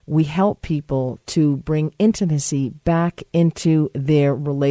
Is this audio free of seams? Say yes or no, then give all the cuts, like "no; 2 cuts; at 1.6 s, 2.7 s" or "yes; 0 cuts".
yes; 0 cuts